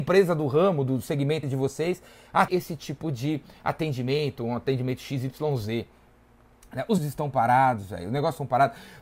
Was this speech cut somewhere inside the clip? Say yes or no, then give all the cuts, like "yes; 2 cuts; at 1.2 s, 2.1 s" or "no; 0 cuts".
yes; 3 cuts; at 1.4 s, 2.5 s, 7.0 s